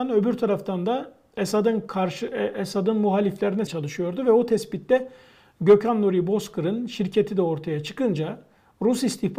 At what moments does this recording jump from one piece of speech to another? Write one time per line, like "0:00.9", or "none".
0:03.7